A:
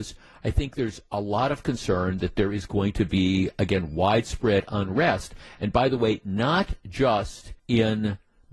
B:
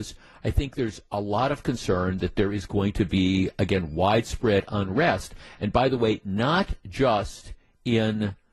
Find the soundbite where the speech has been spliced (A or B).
A